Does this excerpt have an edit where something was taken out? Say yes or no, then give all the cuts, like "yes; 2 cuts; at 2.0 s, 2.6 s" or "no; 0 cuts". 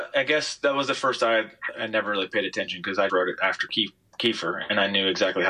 yes; 1 cut; at 3.1 s